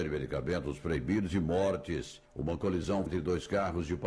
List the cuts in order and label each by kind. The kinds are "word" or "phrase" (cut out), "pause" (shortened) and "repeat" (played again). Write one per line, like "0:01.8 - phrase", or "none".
0:03.1 - word